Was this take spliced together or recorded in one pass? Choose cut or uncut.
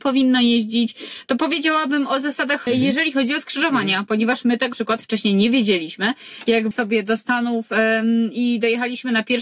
cut